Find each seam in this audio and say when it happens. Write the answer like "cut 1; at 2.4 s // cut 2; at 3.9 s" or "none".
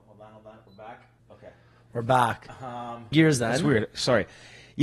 cut 1; at 1.2 s // cut 2; at 3.1 s